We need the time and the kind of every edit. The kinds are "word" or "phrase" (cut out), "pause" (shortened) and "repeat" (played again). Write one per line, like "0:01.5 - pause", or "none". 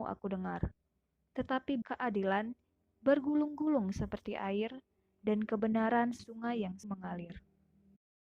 0:01.8 - word
0:06.2 - word
0:06.8 - word